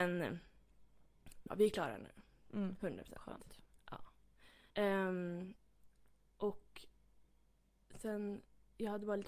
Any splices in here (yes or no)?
yes